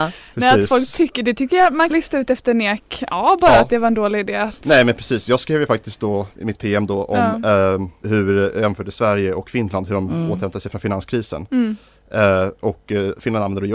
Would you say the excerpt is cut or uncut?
cut